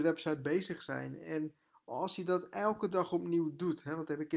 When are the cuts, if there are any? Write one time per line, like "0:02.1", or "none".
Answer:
none